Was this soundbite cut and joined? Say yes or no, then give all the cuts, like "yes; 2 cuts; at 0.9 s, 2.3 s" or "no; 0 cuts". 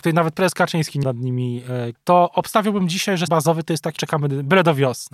yes; 4 cuts; at 1.0 s, 1.9 s, 3.3 s, 4.0 s